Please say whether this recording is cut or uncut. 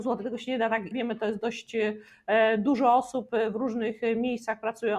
cut